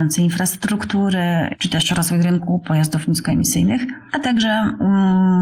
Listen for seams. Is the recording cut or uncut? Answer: uncut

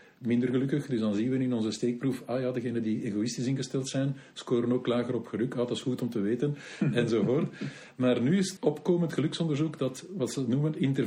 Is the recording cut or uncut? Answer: cut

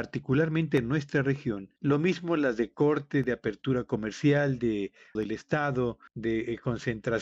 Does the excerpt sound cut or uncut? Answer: cut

